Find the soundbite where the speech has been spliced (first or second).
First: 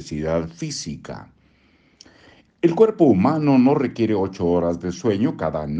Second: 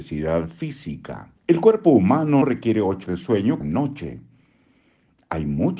second